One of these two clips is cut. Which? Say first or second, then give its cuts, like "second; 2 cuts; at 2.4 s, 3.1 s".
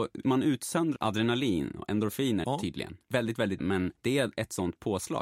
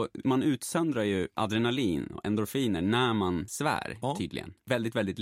first; 3 cuts; at 1.0 s, 2.4 s, 3.6 s